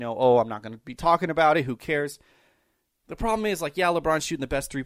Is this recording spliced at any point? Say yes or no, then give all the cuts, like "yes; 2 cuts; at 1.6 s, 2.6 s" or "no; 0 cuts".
no; 0 cuts